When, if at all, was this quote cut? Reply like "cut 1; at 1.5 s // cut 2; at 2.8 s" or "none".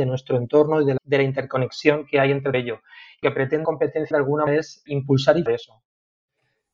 cut 1; at 1.0 s // cut 2; at 2.5 s // cut 3; at 3.2 s // cut 4; at 3.6 s // cut 5; at 4.1 s // cut 6; at 4.5 s // cut 7; at 4.9 s // cut 8; at 5.5 s